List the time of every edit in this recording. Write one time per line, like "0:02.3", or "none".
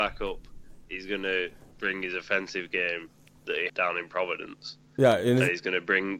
0:03.7